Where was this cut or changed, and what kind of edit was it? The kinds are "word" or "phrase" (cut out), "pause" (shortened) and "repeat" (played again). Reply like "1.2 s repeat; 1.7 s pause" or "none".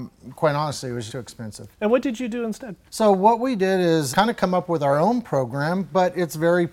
1.1 s word; 1.7 s pause; 2.8 s pause; 4.1 s word